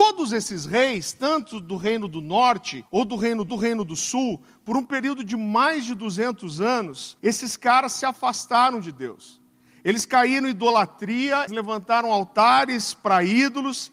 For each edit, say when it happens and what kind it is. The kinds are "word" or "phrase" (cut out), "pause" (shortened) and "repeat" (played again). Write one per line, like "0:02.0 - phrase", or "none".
0:02.9 - pause
0:03.5 - repeat
0:07.2 - pause
0:11.5 - word